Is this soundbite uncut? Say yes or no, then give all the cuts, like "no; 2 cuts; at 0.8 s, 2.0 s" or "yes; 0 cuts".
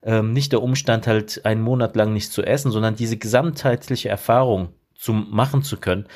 yes; 0 cuts